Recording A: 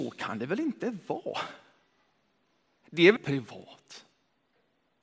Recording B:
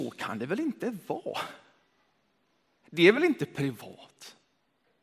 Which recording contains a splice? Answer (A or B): A